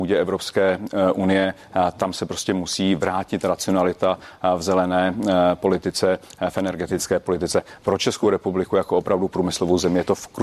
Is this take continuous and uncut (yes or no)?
yes